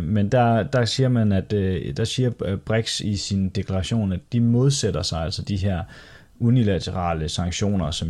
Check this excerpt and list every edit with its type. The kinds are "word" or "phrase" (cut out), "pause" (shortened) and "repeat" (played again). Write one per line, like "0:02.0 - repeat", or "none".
none